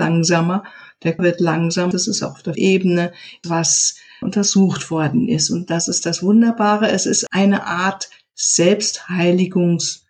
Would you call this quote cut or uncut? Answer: cut